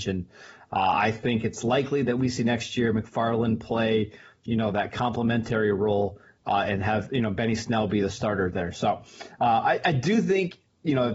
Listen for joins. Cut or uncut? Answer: uncut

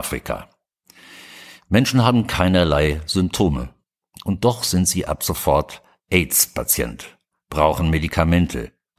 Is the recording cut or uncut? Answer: uncut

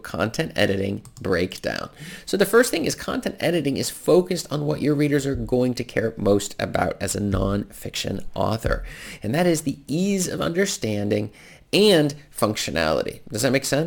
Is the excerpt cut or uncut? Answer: uncut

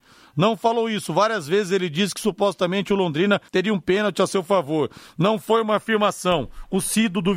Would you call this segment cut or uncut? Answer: cut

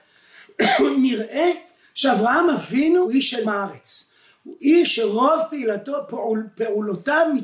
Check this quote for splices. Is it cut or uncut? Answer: cut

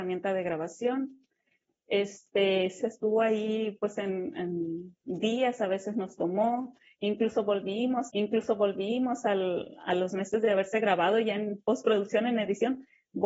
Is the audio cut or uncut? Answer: cut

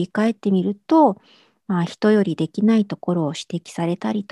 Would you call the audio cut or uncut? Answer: uncut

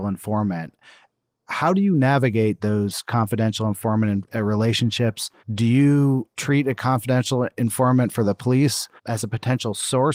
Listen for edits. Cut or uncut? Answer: cut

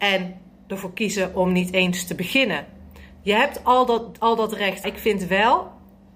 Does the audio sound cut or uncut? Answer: cut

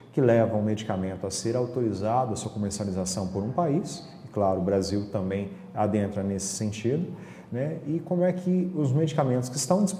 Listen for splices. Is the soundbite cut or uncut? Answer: uncut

